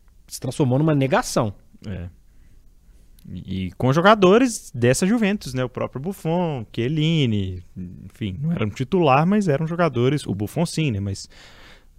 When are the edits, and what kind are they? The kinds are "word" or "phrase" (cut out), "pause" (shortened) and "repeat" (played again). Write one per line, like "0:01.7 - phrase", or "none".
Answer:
none